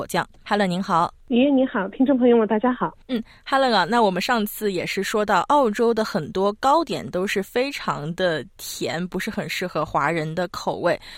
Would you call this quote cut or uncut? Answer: cut